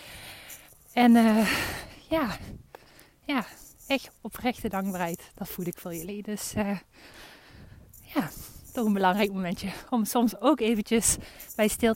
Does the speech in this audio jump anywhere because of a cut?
no; 0 cuts

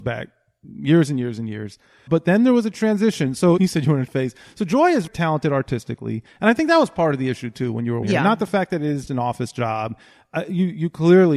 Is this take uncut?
no; 6 cuts; at 2.1 s, 3.6 s, 4.1 s, 5.1 s, 8.0 s, 9.1 s

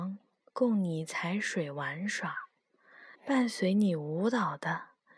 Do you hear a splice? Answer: yes; 1 cut; at 3.1 s

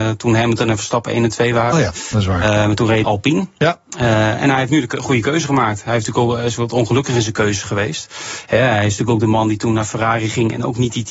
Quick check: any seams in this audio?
yes; 1 cut; at 3.0 s

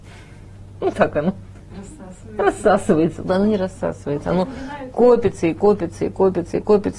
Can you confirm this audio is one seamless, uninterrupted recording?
no; 1 cut; at 0.9 s

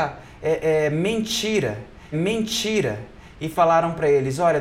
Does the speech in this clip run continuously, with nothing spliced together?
no; 1 cut; at 2.1 s

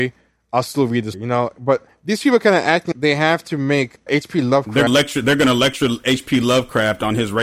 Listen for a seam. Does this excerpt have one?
yes; 4 cuts; at 1.1 s, 2.9 s, 4.1 s, 4.9 s

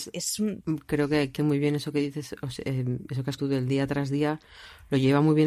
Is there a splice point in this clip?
yes; 2 cuts; at 1.4 s, 3.4 s

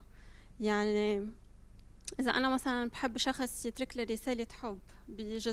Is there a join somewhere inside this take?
no; 0 cuts

